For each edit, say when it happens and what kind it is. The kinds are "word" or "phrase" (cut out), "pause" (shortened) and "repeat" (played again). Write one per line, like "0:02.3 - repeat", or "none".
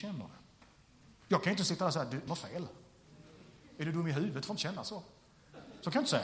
0:01.2 - pause
0:02.3 - word